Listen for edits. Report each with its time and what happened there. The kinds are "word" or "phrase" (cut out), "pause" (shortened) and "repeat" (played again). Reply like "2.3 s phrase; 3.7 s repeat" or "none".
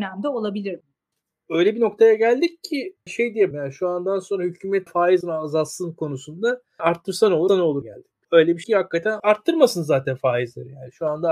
3.1 s word; 3.5 s word; 4.9 s word; 5.2 s word; 6.8 s word; 7.5 s word; 7.8 s word; 8.6 s word; 9.2 s word